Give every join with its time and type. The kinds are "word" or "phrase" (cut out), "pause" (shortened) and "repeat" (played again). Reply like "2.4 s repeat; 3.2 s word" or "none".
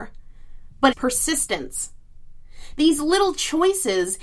0.9 s word